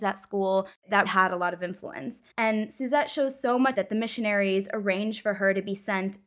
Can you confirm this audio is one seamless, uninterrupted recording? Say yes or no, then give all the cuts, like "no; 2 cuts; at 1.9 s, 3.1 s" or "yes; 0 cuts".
no; 3 cuts; at 1.1 s, 2.3 s, 3.7 s